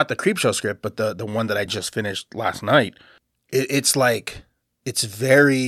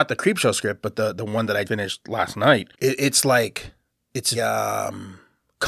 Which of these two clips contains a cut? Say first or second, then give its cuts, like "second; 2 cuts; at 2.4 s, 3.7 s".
second; 3 cuts; at 1.6 s, 2.7 s, 4.3 s